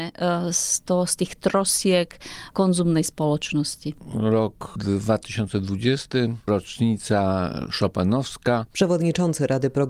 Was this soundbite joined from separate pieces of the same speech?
no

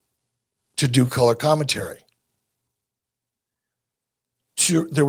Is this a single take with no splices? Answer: yes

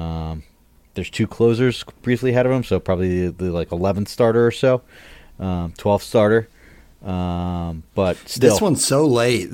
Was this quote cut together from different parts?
no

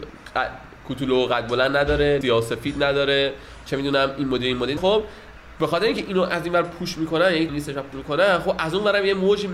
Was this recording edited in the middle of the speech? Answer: yes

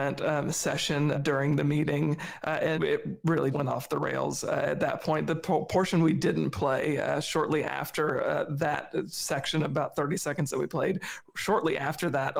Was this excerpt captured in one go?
no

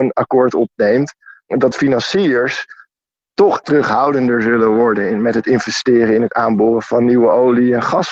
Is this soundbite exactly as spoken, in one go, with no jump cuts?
no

